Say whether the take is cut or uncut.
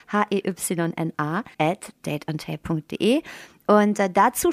cut